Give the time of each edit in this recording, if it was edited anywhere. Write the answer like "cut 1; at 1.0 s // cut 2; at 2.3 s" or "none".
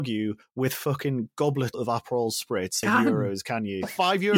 cut 1; at 1.7 s // cut 2; at 2.8 s